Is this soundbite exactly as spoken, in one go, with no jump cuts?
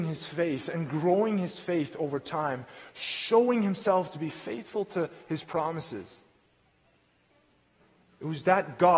yes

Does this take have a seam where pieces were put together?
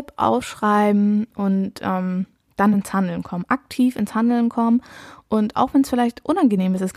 no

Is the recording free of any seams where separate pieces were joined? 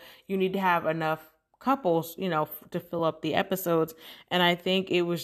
yes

